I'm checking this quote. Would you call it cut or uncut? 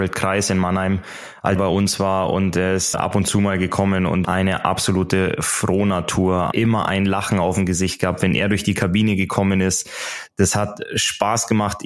cut